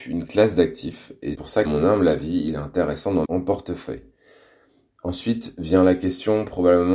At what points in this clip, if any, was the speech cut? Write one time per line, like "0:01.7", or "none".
0:01.4
0:01.7
0:03.3